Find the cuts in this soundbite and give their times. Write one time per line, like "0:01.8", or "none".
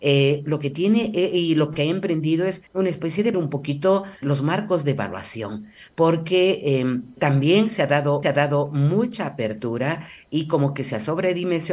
0:02.7
0:03.3
0:04.2
0:07.2
0:08.2